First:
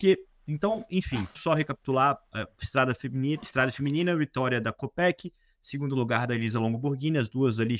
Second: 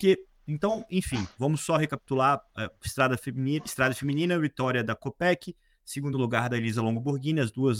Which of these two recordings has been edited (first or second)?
first